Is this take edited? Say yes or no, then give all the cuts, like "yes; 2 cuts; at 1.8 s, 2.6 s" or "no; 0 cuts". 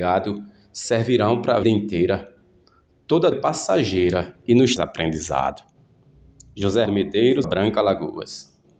yes; 5 cuts; at 1.6 s, 3.3 s, 4.8 s, 6.9 s, 7.4 s